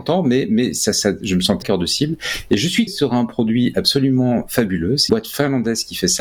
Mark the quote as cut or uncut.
cut